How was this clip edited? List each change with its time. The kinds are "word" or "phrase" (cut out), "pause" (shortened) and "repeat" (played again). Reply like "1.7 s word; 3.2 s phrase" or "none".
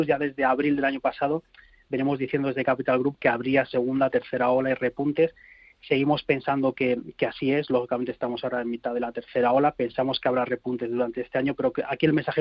none

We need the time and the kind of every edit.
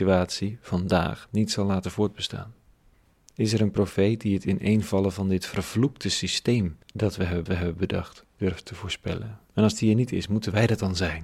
2.9 s pause; 6.8 s pause; 7.5 s repeat; 9.5 s pause

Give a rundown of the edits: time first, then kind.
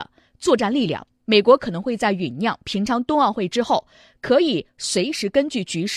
none

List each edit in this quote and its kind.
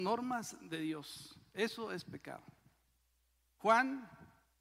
none

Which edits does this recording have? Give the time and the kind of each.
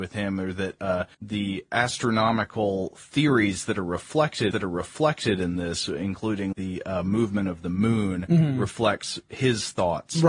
1.1 s pause; 4.5 s repeat; 6.5 s word

